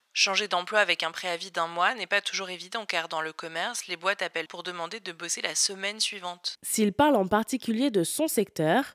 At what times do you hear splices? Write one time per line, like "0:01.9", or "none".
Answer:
0:04.5